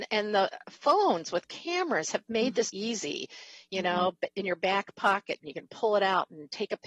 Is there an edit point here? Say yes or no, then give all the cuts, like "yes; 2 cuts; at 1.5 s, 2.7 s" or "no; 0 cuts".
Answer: yes; 1 cut; at 2.7 s